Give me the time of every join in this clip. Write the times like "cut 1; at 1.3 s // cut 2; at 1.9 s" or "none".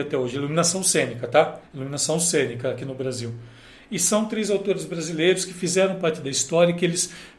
cut 1; at 1.7 s